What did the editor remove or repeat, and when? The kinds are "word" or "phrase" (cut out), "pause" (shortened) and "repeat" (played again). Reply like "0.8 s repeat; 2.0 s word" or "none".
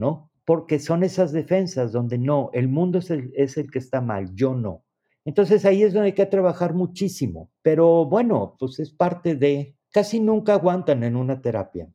5.1 s pause; 7.6 s pause; 9.8 s pause